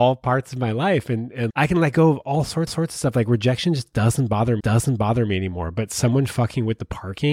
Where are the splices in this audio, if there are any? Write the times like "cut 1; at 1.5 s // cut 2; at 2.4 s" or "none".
cut 1; at 1.5 s // cut 2; at 2.7 s // cut 3; at 4.6 s